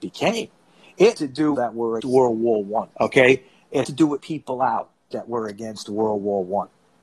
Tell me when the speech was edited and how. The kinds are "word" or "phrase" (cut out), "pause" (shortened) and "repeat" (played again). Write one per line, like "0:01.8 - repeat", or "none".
0:01.1 - word
0:01.5 - phrase
0:02.0 - word
0:02.9 - pause
0:03.8 - word
0:04.2 - word